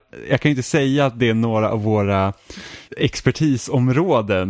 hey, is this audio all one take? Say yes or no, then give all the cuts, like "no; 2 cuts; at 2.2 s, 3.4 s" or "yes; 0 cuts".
no; 1 cut; at 2.9 s